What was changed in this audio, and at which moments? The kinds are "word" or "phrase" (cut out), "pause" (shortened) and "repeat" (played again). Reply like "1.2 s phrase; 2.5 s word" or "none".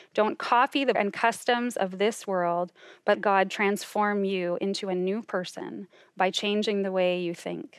0.9 s word; 3.1 s word